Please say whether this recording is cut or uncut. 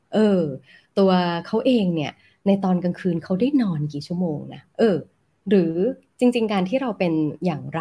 cut